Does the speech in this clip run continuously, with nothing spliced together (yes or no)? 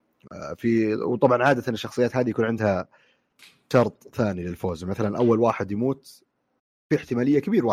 yes